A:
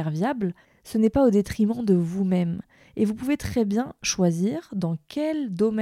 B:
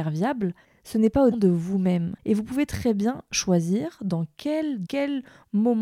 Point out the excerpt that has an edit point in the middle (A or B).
B